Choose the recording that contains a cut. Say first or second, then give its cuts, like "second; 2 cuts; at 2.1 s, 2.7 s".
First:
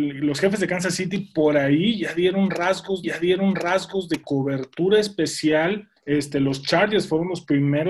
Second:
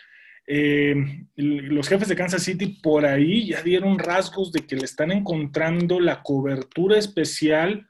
first; 3 cuts; at 3.0 s, 4.2 s, 6.0 s